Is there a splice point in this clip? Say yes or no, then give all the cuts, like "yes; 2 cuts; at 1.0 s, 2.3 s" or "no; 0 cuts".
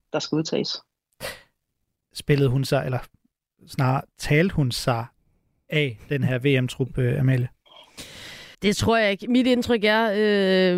yes; 1 cut; at 8.5 s